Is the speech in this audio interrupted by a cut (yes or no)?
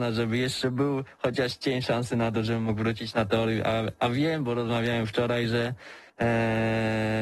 yes